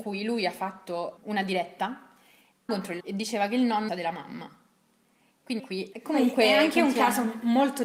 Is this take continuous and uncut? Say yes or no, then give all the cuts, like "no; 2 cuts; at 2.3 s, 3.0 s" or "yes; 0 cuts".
no; 6 cuts; at 1.2 s, 2.7 s, 3.0 s, 3.9 s, 5.6 s, 5.9 s